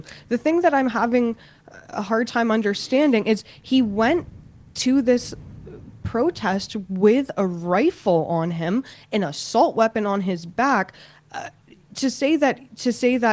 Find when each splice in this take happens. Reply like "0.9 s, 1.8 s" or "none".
none